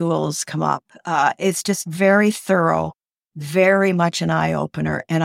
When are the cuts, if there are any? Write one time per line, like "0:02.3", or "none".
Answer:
none

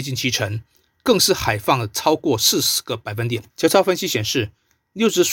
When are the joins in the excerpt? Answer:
0:03.5

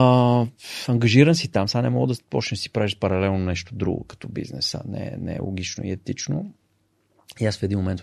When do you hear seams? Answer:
none

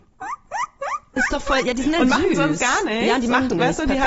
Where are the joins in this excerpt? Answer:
none

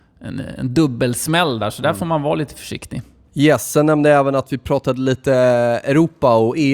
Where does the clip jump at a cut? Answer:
none

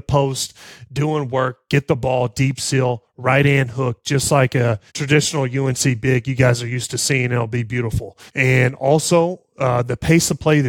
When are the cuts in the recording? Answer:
0:04.9
0:08.3

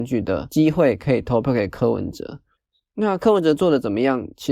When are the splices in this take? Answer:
0:02.6

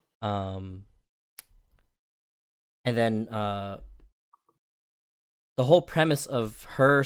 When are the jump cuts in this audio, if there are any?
none

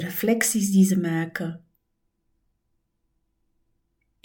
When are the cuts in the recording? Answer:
none

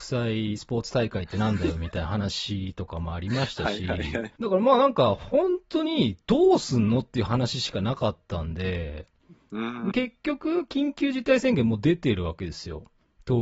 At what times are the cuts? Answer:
0:04.4
0:09.9

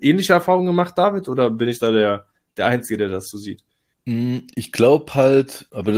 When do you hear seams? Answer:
0:03.9

